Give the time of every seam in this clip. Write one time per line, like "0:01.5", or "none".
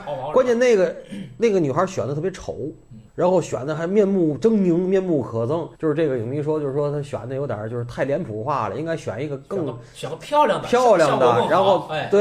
0:03.1
0:05.7